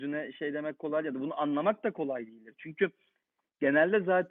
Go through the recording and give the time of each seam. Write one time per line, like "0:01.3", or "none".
none